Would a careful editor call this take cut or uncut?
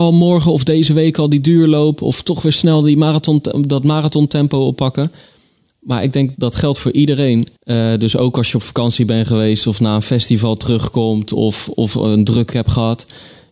cut